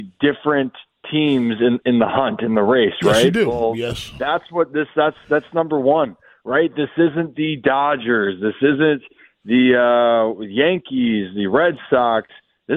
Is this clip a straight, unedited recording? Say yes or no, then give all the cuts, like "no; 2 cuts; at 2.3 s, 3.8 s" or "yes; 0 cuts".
yes; 0 cuts